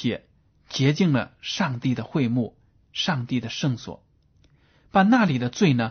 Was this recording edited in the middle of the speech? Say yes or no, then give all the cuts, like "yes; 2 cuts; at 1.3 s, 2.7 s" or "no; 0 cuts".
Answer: no; 0 cuts